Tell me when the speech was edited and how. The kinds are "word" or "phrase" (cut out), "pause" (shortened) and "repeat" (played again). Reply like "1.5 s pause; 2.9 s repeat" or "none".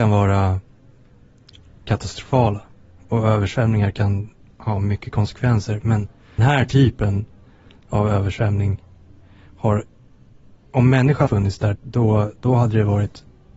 6.4 s word; 11.3 s word; 11.7 s word